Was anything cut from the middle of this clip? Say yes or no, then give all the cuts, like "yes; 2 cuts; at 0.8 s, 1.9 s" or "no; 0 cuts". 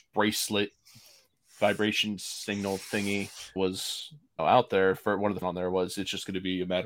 yes; 3 cuts; at 3.6 s, 4.4 s, 5.4 s